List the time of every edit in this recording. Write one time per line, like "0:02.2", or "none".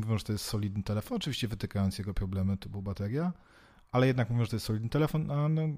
none